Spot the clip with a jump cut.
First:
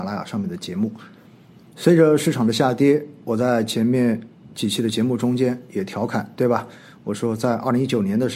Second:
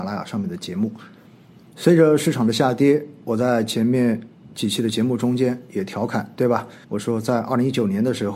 second; 1 cut; at 6.8 s

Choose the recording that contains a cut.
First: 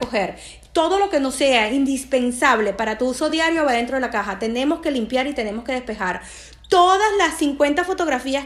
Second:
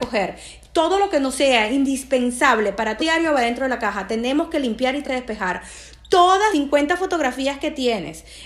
second; 3 cuts; at 3.0 s, 5.0 s, 6.5 s

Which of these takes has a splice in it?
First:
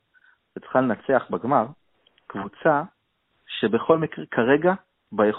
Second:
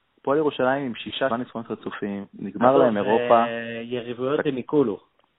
second; 1 cut; at 1.3 s

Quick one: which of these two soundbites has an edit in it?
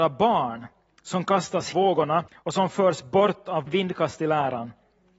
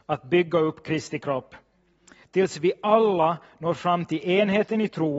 first; 3 cuts; at 1.7 s, 2.3 s, 3.7 s

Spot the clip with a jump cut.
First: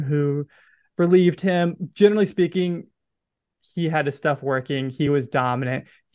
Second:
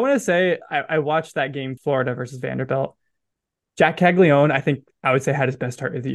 second; 1 cut; at 1.8 s

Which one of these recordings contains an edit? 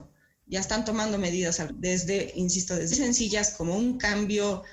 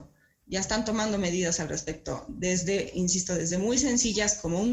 first; 2 cuts; at 1.7 s, 2.9 s

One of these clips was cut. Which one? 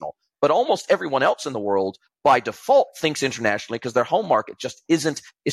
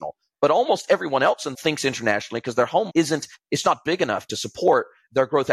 second; 3 cuts; at 1.5 s, 2.9 s, 3.6 s

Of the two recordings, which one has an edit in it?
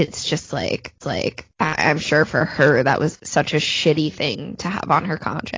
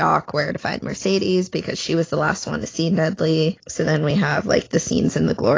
first; 2 cuts; at 1.0 s, 3.2 s

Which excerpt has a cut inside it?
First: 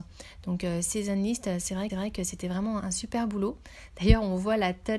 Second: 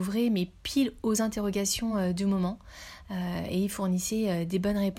first; 2 cuts; at 1.9 s, 2.8 s

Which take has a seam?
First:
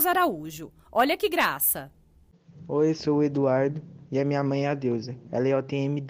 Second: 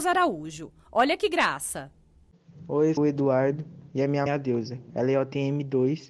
second; 2 cuts; at 3.0 s, 4.3 s

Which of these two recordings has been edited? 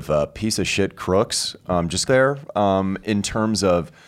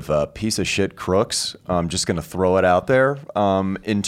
first; 1 cut; at 2.1 s

